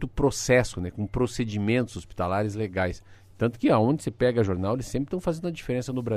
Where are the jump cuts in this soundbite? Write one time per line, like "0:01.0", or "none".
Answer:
none

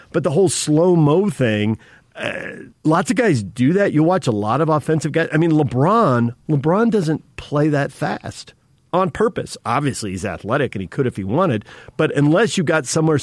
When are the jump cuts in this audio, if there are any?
0:02.7
0:06.4

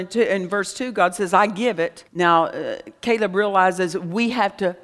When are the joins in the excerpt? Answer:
0:02.1

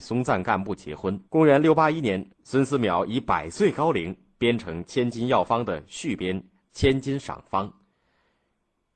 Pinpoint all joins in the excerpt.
0:01.3
0:02.3

